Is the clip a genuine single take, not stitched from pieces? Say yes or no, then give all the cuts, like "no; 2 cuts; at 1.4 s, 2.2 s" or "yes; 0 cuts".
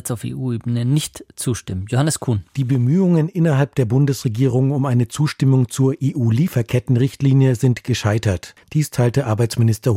no; 1 cut; at 2.5 s